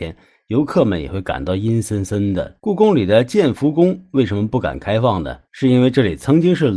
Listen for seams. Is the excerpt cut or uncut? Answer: cut